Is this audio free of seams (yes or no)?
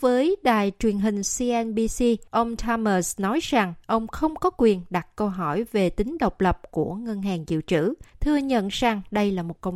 no